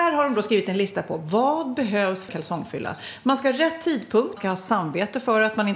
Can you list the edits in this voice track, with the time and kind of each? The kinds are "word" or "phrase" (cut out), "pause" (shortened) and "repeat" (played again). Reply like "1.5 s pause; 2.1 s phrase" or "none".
2.3 s word; 4.4 s word